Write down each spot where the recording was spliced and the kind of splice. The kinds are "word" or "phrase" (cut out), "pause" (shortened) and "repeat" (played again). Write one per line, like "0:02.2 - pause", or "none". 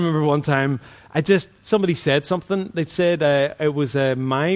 none